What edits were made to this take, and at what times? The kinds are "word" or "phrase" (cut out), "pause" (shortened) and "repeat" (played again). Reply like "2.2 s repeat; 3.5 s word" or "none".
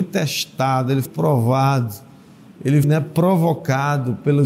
1.1 s word; 2.8 s word